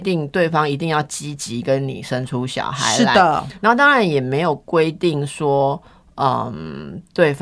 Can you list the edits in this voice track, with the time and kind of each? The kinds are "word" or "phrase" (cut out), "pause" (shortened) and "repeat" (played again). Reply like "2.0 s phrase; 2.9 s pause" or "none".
none